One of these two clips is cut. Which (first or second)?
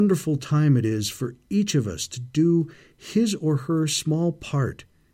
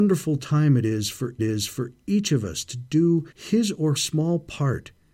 second